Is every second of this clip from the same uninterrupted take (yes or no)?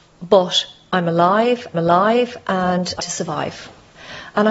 no